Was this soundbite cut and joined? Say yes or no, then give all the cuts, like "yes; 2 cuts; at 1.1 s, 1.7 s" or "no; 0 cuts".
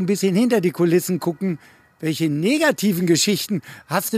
no; 0 cuts